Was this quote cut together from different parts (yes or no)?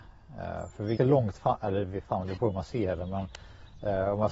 yes